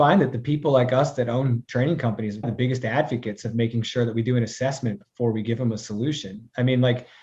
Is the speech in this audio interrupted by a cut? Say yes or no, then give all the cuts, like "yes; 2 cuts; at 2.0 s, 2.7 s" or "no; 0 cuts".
yes; 1 cut; at 2.4 s